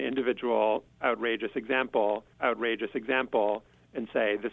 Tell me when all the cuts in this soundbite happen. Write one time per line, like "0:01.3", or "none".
0:02.3